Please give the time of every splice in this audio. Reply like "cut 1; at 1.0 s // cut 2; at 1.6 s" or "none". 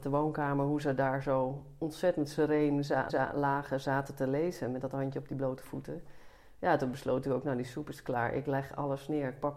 cut 1; at 3.1 s